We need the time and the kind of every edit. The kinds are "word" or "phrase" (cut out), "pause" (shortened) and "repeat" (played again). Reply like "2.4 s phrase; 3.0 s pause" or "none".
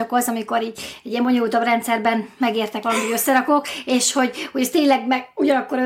none